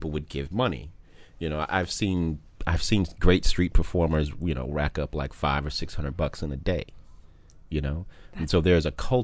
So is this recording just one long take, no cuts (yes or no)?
yes